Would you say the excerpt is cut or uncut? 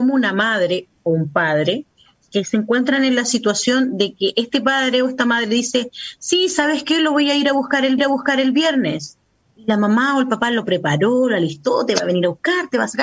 cut